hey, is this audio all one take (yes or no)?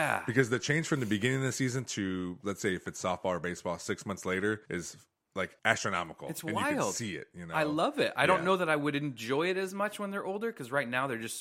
no